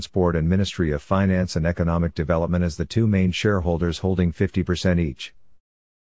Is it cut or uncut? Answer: uncut